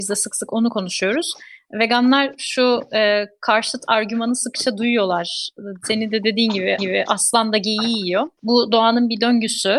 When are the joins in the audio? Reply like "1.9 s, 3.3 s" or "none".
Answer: 6.8 s